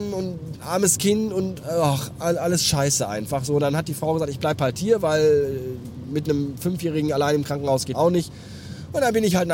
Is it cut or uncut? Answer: cut